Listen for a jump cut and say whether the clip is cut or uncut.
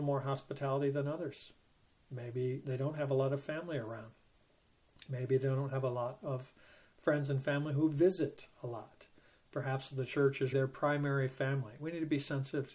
cut